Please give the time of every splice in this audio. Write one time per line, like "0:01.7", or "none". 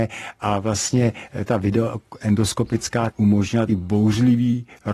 0:01.5
0:03.1
0:03.7